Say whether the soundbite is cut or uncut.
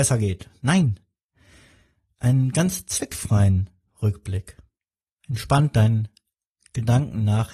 uncut